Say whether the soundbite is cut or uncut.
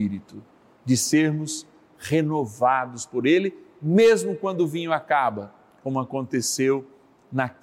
uncut